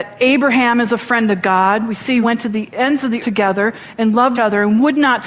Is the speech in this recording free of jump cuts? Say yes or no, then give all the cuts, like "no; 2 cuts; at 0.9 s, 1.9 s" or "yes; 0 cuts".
no; 3 cuts; at 2.2 s, 3.2 s, 4.3 s